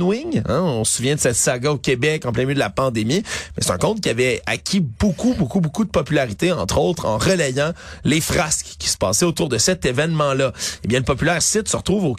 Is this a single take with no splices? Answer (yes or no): yes